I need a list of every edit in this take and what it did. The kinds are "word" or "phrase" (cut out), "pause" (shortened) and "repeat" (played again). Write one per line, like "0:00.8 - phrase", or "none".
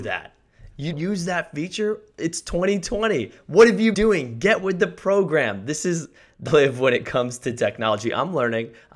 0:00.9 - word
0:03.9 - word
0:06.5 - phrase